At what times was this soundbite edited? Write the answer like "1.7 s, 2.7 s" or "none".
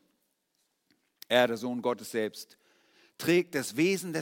none